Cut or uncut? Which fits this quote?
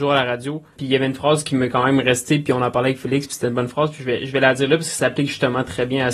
uncut